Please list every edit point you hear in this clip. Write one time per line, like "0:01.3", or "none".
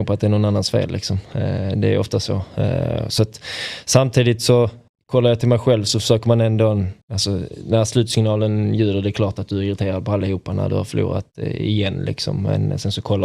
0:04.9
0:07.0